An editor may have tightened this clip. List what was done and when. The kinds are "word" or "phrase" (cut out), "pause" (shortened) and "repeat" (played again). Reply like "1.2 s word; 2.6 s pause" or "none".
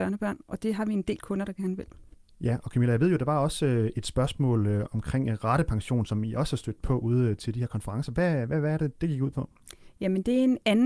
none